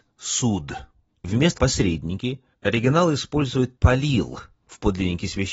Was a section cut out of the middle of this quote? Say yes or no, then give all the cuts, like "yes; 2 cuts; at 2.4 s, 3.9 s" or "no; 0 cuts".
yes; 3 cuts; at 1.2 s, 1.6 s, 3.8 s